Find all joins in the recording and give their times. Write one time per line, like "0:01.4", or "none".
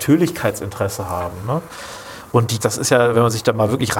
0:02.6